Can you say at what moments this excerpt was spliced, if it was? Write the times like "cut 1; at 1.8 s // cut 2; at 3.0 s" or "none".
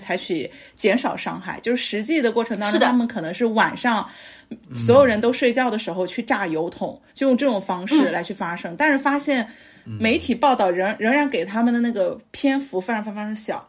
cut 1; at 7.1 s